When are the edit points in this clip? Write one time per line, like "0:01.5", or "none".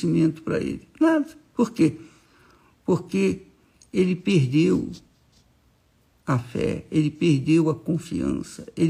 none